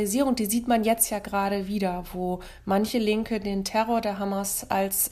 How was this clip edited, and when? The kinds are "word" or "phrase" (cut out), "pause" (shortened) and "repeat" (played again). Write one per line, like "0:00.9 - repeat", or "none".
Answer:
none